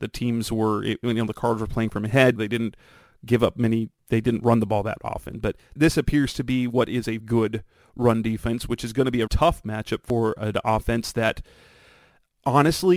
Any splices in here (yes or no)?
yes